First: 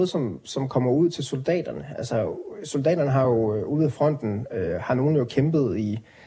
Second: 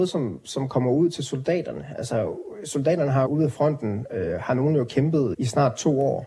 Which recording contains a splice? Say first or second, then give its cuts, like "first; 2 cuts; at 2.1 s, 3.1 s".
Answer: second; 2 cuts; at 3.3 s, 5.3 s